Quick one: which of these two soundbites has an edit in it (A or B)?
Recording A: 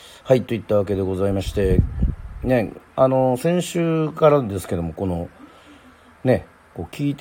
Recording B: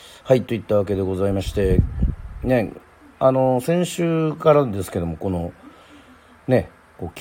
A